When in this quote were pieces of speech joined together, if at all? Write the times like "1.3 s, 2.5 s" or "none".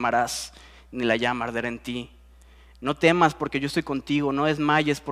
none